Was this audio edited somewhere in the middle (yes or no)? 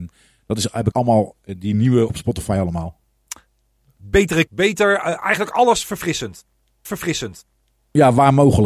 yes